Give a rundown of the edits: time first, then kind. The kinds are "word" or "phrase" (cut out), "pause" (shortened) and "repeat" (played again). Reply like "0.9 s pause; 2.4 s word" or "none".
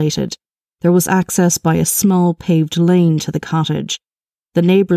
none